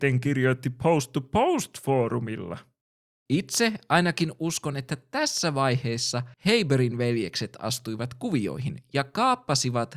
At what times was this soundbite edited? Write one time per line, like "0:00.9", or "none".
0:06.3